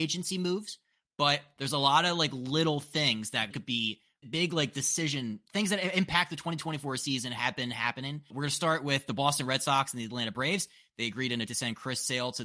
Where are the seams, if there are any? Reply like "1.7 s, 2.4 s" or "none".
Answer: 3.5 s, 4.2 s, 8.3 s, 11.5 s